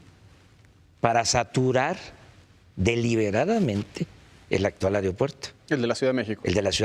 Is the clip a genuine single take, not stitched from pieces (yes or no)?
yes